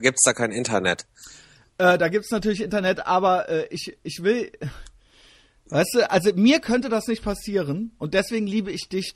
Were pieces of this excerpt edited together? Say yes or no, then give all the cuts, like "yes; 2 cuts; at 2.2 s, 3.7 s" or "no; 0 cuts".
no; 0 cuts